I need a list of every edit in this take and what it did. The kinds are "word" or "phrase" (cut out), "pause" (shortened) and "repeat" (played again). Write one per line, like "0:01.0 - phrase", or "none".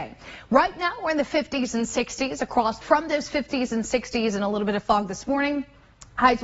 0:02.8 - word